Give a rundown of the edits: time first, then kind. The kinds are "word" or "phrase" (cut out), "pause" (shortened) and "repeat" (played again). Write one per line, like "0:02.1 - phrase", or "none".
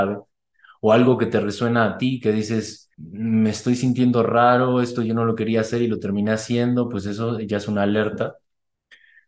0:02.9 - pause